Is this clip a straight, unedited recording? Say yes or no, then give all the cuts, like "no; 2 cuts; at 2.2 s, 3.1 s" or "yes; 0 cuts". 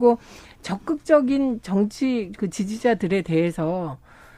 no; 1 cut; at 2.4 s